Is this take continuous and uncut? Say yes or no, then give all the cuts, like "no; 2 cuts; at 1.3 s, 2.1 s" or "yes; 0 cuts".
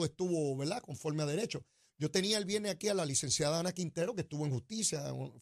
yes; 0 cuts